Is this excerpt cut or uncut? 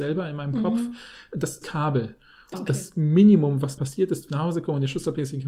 cut